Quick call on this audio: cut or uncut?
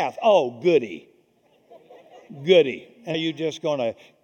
cut